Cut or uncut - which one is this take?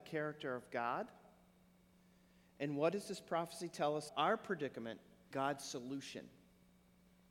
cut